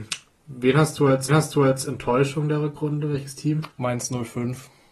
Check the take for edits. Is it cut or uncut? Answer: cut